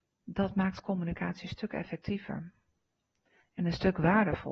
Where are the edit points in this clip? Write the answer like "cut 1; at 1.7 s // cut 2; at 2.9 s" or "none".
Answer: none